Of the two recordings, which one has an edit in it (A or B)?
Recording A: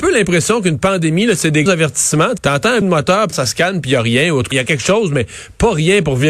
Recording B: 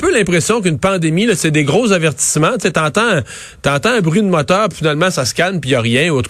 A